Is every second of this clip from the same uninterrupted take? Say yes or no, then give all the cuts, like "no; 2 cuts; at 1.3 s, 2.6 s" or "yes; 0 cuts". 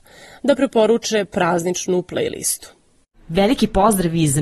yes; 0 cuts